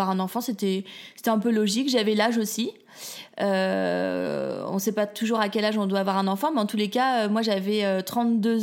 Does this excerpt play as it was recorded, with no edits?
yes; 0 cuts

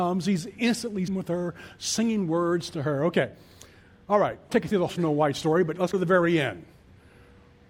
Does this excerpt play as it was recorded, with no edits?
no; 4 cuts; at 1.1 s, 4.5 s, 4.9 s, 5.9 s

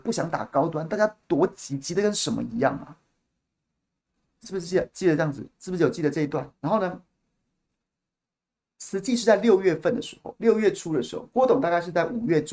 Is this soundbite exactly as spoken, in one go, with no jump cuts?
no; 1 cut; at 6.6 s

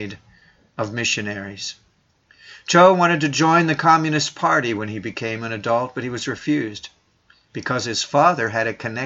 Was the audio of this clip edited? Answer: no; 0 cuts

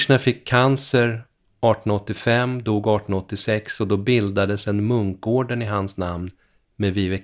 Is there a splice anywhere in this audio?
no; 0 cuts

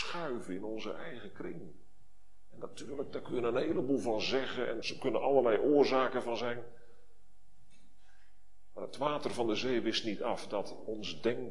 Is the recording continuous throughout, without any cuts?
no; 1 cut; at 4.8 s

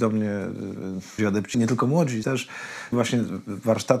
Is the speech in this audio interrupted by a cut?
yes; 4 cuts; at 1.2 s, 1.5 s, 2.2 s, 2.9 s

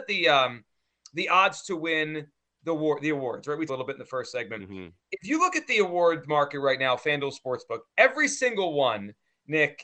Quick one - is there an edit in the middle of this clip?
yes; 1 cut; at 3.7 s

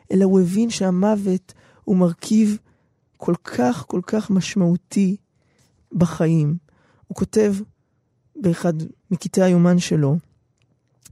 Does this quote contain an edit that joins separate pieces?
no; 0 cuts

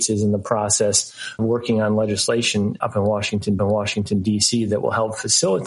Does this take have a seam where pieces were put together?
yes; 3 cuts; at 1.4 s, 2.8 s, 3.6 s

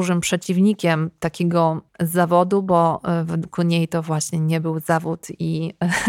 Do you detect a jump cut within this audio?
yes; 1 cut; at 1.9 s

